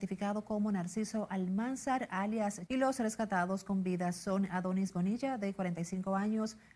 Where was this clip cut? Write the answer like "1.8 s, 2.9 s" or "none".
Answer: 2.7 s